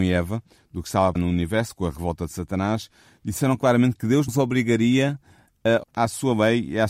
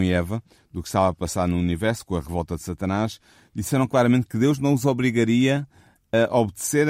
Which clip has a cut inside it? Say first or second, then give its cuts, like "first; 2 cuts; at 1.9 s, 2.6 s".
first; 3 cuts; at 1.2 s, 4.3 s, 5.8 s